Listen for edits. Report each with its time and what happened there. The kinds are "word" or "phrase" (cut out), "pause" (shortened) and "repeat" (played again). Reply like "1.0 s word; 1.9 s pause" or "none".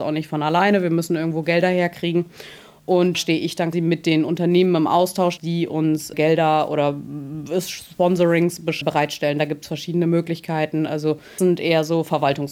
3.1 s word; 3.7 s word; 5.4 s word; 6.1 s word; 8.8 s word; 11.4 s word